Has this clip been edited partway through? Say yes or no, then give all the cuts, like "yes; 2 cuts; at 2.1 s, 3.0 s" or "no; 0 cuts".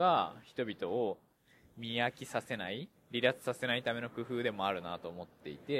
no; 0 cuts